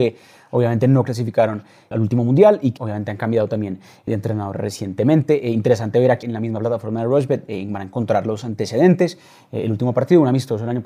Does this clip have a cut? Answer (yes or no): yes